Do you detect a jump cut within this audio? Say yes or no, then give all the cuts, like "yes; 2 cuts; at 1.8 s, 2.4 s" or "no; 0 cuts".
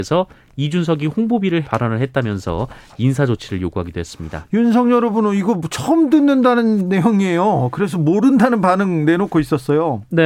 yes; 1 cut; at 1.6 s